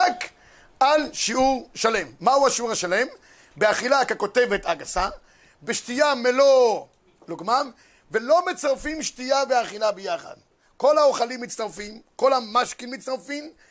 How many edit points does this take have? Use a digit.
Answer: 0